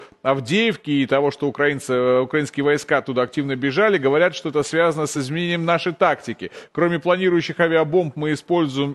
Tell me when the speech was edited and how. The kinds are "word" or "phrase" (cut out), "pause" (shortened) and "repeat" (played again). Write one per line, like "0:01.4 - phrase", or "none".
none